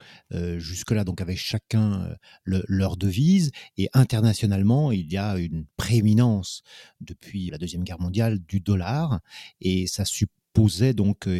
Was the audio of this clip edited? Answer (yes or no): yes